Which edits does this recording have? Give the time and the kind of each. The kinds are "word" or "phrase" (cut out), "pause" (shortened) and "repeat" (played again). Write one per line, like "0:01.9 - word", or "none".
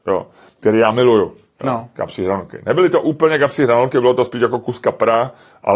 none